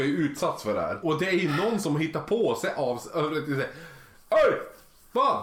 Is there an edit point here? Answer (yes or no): no